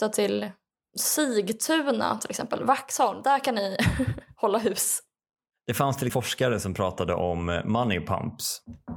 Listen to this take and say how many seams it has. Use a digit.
1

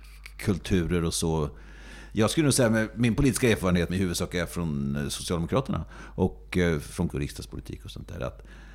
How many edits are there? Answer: 2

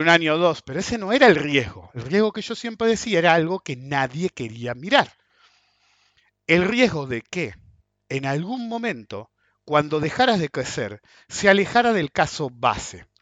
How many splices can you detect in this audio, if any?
0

